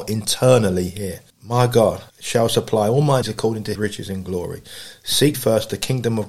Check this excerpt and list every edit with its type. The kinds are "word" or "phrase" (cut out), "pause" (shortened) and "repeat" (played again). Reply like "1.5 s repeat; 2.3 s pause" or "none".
1.3 s pause; 2.1 s pause; 3.2 s word; 3.8 s word; 5.3 s word